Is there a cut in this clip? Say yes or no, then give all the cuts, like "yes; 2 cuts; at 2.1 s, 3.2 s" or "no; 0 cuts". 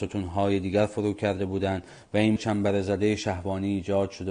yes; 1 cut; at 2.4 s